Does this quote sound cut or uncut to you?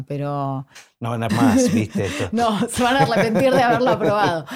cut